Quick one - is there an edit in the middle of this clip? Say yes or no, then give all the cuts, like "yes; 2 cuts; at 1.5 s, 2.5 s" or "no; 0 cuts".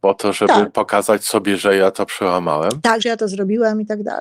yes; 1 cut; at 3.0 s